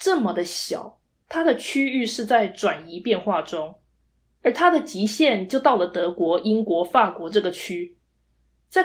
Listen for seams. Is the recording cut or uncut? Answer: uncut